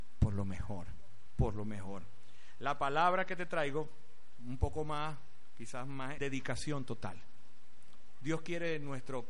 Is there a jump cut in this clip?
yes; 1 cut; at 6.2 s

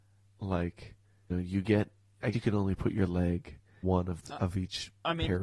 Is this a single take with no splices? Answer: no; 4 cuts; at 1.3 s, 2.3 s, 3.8 s, 4.3 s

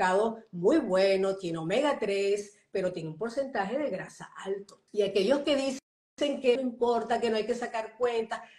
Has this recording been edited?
yes; 2 cuts; at 4.9 s, 6.6 s

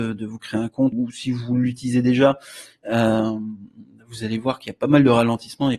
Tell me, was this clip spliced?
yes; 1 cut; at 0.9 s

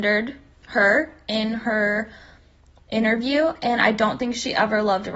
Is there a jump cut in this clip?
no; 0 cuts

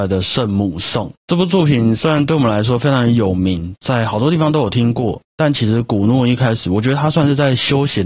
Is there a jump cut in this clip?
yes; 1 cut; at 1.2 s

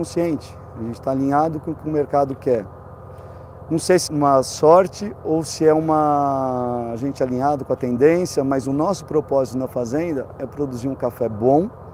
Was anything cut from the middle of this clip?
yes; 1 cut; at 4.1 s

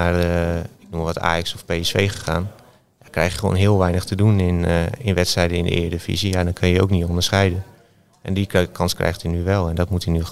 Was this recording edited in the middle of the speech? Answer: no; 0 cuts

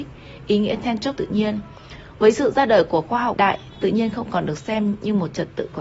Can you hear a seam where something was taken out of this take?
yes; 2 cuts; at 1.2 s, 3.3 s

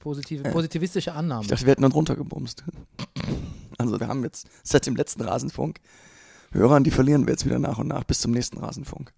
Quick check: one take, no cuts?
no; 2 cuts; at 1.9 s, 4.0 s

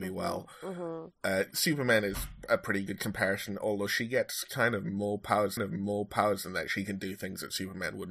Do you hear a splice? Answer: yes; 2 cuts; at 1.5 s, 5.6 s

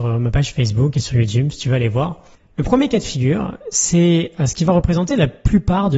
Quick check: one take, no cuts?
yes; 0 cuts

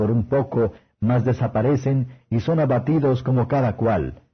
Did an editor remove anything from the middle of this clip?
no; 0 cuts

